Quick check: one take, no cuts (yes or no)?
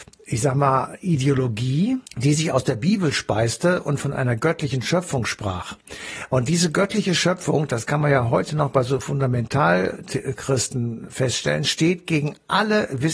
no